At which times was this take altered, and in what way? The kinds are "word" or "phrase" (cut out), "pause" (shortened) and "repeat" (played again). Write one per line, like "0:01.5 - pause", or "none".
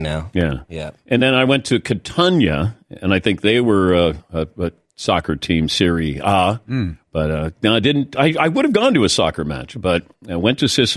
none